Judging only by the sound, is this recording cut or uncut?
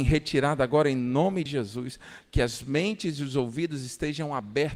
cut